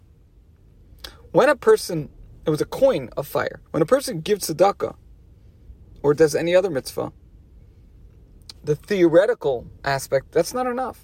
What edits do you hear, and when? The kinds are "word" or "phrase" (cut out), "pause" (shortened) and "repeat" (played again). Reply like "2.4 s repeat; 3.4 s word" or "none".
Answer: 3.7 s pause